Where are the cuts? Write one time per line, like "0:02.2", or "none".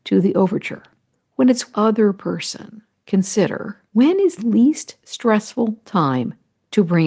0:01.7
0:03.9
0:04.4